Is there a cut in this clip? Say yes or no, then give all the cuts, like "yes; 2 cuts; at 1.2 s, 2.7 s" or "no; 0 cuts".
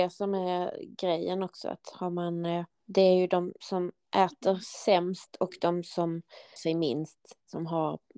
yes; 2 cuts; at 2.7 s, 6.6 s